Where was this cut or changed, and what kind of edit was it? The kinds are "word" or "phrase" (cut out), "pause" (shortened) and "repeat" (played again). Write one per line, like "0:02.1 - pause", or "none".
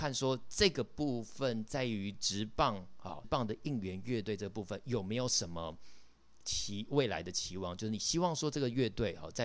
0:03.2 - word

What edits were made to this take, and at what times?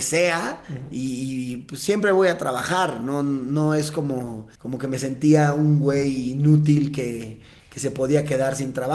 0:04.5 - pause

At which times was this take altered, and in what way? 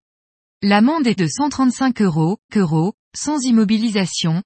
0:01.2 - word
0:02.5 - repeat

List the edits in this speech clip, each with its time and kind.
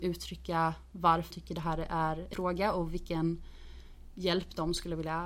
0:01.3 - word
0:02.3 - word

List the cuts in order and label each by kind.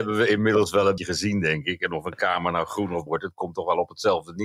0:01.0 - word
0:03.1 - word

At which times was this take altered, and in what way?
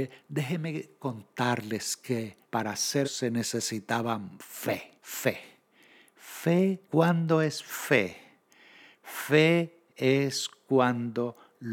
0:02.4 - pause
0:03.0 - word
0:05.0 - pause
0:06.8 - pause

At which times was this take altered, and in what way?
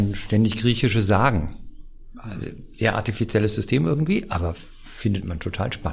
none

